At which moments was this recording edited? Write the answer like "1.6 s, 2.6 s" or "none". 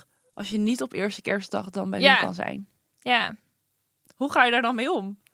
none